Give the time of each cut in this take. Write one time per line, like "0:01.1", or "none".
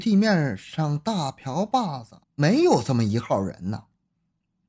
0:02.2